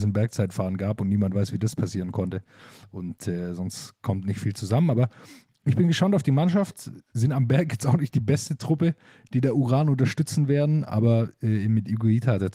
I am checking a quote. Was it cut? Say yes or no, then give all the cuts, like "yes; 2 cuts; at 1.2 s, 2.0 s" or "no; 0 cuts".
no; 0 cuts